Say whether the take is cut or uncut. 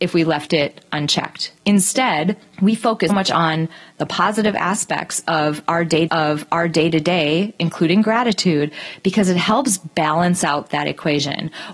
cut